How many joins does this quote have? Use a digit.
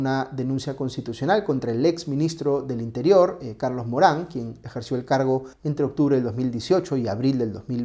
1